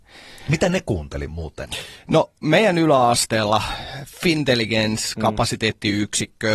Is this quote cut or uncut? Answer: uncut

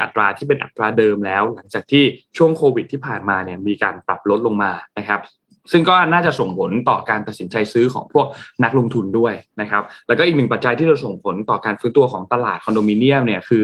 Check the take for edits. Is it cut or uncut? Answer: uncut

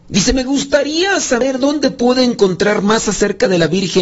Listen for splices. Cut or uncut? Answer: uncut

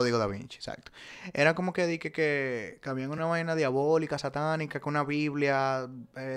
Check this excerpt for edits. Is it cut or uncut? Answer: uncut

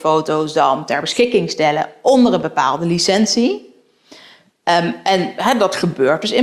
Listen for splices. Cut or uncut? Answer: uncut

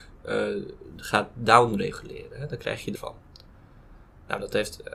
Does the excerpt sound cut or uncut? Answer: cut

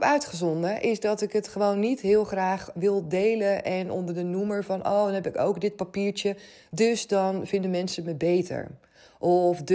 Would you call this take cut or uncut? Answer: uncut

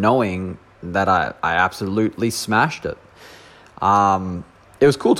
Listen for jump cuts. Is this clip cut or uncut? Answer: uncut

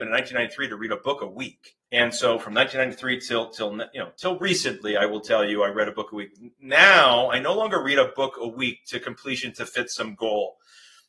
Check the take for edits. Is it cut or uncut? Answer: cut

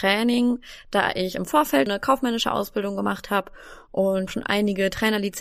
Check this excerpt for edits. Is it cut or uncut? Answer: cut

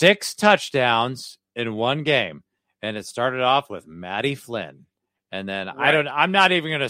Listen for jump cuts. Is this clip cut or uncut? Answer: uncut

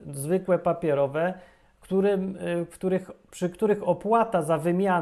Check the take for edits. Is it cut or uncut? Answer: uncut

